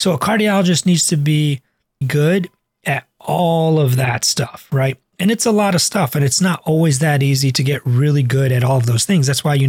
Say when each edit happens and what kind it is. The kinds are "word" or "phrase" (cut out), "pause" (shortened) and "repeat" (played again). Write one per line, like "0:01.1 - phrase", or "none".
0:02.0 - word